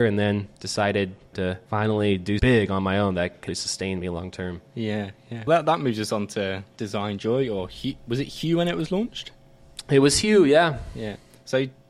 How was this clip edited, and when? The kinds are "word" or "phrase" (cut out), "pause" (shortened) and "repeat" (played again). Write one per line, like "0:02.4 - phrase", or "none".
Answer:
0:01.3 - phrase
0:02.4 - word
0:03.5 - word